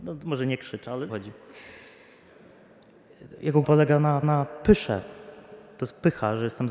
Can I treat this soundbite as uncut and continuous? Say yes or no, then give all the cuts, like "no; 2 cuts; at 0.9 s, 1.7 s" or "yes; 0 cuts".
no; 3 cuts; at 1.1 s, 3.6 s, 4.2 s